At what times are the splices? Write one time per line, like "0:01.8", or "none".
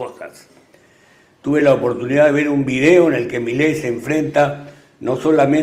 none